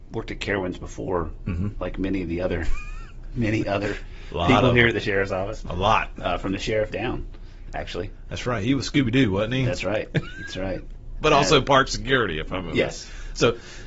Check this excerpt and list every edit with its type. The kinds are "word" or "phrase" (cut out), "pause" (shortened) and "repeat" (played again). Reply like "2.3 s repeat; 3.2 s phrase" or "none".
none